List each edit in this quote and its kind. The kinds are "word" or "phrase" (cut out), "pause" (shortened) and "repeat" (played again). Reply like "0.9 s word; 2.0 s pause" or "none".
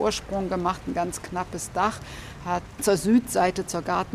none